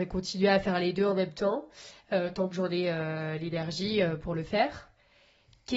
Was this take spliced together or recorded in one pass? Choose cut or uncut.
uncut